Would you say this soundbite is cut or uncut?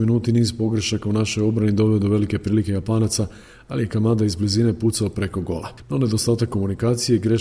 uncut